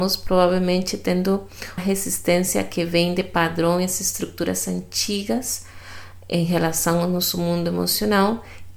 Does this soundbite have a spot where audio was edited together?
yes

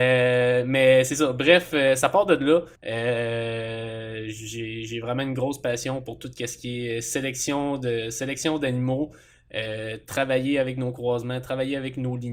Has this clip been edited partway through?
yes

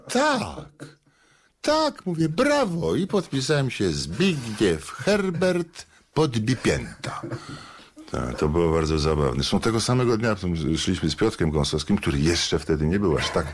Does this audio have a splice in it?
no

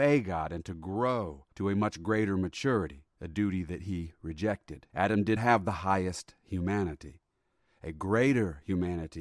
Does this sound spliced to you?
yes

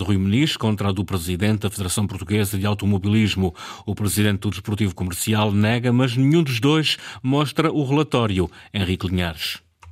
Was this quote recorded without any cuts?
yes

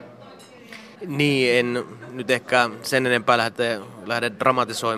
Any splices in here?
yes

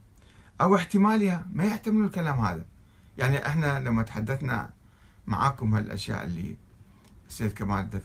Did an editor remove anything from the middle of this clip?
no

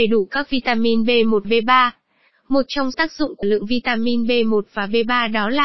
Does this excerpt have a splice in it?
yes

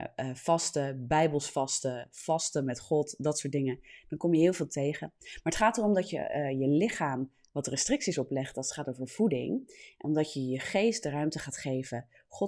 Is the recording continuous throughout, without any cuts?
yes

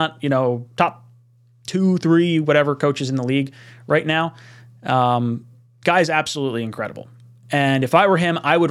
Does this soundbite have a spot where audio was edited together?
no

